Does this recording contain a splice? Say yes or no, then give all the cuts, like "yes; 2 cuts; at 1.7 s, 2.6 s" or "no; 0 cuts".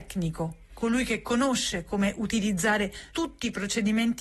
yes; 1 cut; at 3.1 s